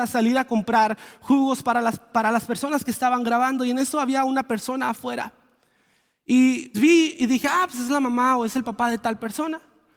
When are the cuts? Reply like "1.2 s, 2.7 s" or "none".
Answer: 6.7 s